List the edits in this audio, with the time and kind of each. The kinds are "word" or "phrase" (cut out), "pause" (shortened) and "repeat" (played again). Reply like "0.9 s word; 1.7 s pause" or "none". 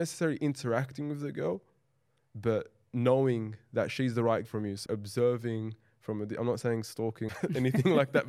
4.4 s word; 4.9 s word; 7.3 s word